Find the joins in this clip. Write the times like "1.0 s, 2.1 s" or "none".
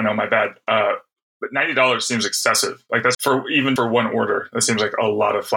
3.1 s, 3.8 s